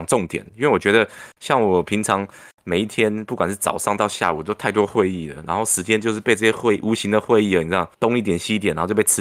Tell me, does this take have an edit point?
yes; 1 cut; at 7.9 s

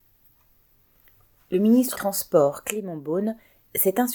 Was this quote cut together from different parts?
yes; 1 cut; at 1.9 s

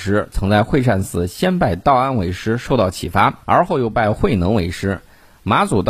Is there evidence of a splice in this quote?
yes; 1 cut; at 3.4 s

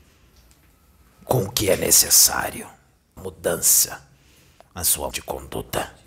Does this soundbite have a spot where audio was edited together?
yes; 2 cuts; at 3.2 s, 5.1 s

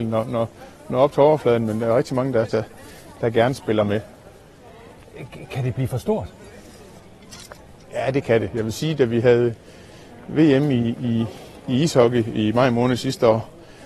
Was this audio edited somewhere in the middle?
no; 0 cuts

